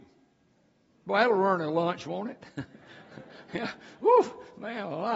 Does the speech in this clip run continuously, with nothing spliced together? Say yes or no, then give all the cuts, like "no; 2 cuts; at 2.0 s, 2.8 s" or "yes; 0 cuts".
yes; 0 cuts